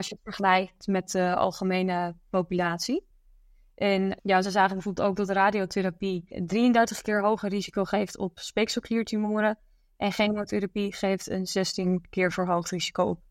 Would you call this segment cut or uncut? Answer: uncut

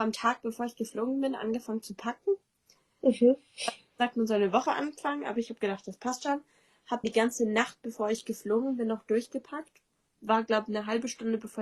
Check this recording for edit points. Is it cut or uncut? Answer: cut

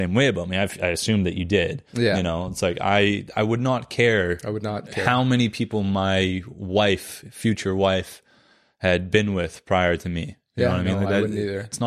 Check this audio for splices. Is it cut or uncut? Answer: cut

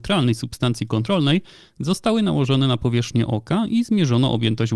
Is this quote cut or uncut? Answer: uncut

